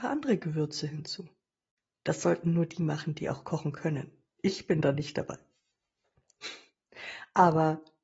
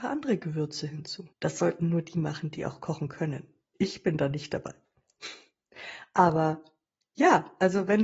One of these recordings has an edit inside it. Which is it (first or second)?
second